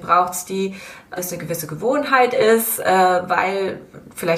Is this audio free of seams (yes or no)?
no